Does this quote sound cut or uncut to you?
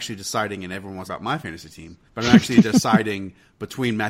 cut